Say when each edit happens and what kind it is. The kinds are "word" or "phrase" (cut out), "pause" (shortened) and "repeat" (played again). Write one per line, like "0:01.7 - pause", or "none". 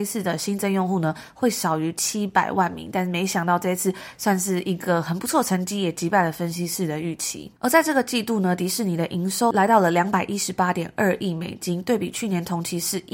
0:07.6 - pause